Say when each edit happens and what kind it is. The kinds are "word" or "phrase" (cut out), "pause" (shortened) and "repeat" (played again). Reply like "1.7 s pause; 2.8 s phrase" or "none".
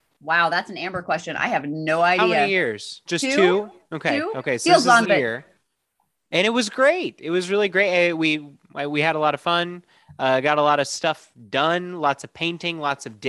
5.0 s phrase